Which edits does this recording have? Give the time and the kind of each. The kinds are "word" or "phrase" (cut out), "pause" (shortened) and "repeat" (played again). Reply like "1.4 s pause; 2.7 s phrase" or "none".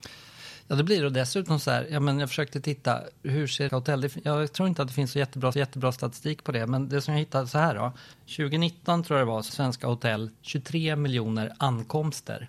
3.2 s word; 3.7 s phrase; 5.5 s repeat; 8.1 s pause; 9.5 s word; 10.3 s pause